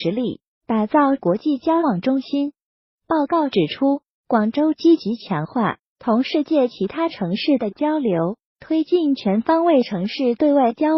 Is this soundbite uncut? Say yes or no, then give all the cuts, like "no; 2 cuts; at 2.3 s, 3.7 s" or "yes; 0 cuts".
yes; 0 cuts